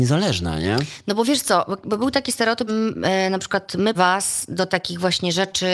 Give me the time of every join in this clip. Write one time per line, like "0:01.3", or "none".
0:02.7
0:03.9
0:04.7